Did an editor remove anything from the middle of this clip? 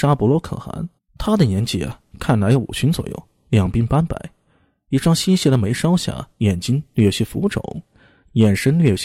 yes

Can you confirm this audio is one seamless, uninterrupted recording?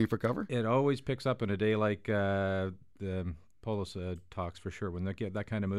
yes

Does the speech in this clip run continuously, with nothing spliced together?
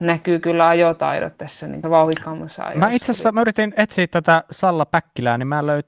no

